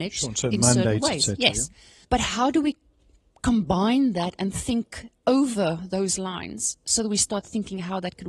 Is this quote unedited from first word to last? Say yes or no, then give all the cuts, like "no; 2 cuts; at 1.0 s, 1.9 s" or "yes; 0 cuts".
yes; 0 cuts